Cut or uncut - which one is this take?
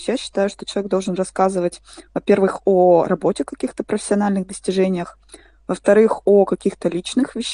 uncut